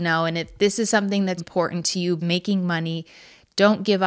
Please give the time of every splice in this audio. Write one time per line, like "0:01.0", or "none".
0:01.4
0:02.2